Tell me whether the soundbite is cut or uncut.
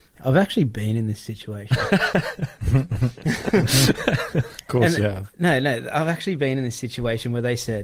uncut